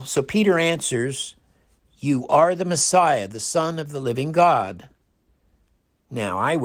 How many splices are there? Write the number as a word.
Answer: zero